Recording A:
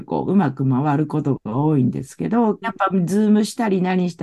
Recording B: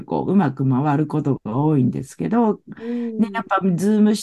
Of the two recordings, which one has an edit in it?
A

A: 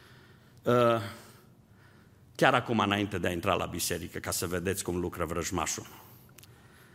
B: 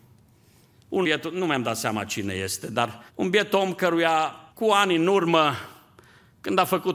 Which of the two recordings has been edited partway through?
B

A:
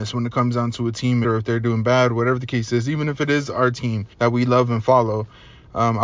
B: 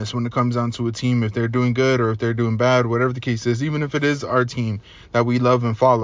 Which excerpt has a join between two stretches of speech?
A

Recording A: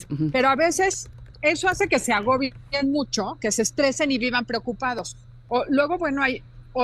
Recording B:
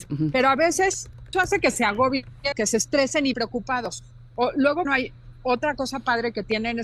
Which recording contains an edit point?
B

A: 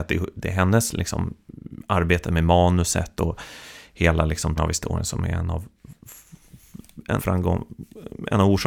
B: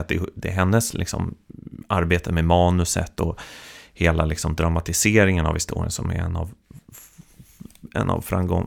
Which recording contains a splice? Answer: A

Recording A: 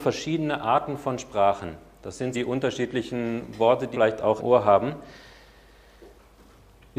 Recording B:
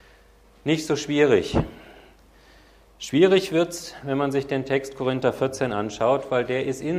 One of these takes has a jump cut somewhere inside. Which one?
A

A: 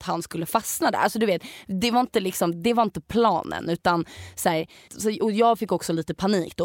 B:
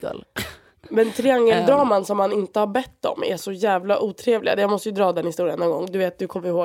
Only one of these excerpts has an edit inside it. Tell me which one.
A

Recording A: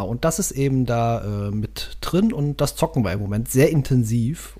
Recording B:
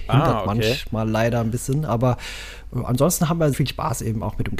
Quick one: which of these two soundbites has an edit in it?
B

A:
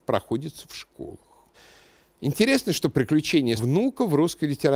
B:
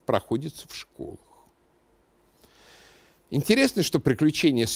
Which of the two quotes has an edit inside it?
A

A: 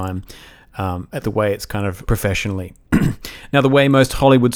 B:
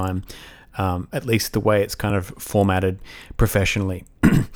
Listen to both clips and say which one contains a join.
A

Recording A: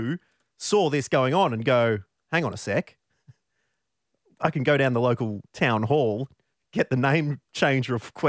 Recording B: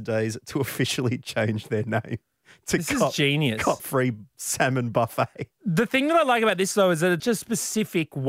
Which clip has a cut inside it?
B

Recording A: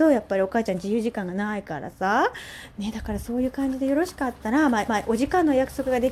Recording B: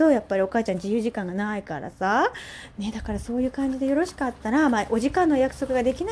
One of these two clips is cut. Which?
A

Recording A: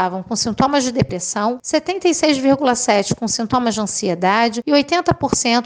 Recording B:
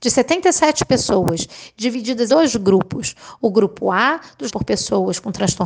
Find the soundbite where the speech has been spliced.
B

